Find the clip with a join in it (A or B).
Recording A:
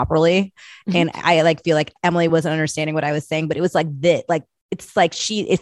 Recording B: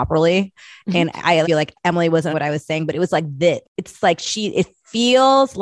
B